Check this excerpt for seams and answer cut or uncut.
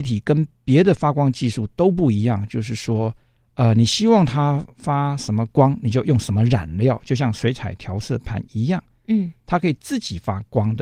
uncut